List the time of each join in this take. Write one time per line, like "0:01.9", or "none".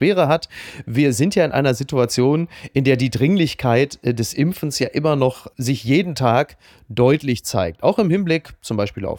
none